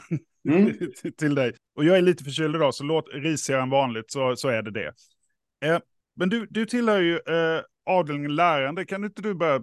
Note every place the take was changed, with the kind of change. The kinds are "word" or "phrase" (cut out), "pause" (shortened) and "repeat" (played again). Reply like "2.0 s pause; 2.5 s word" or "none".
1.6 s pause; 3.1 s phrase; 6.0 s pause